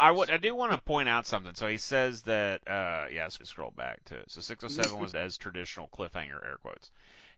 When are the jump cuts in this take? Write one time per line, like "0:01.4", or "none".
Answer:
0:03.4
0:05.1